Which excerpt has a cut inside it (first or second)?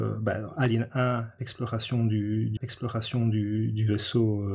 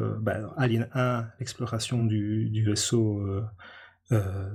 first